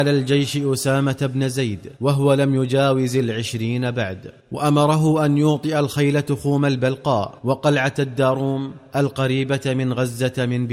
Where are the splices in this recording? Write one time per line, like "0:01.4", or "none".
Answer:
0:02.0
0:04.4
0:07.4
0:08.9